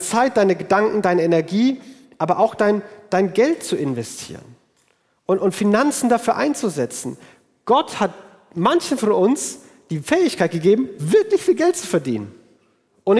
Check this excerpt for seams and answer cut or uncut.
uncut